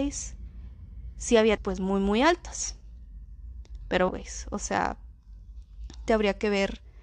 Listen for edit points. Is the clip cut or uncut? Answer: cut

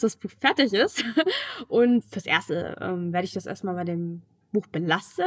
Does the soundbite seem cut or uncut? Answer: cut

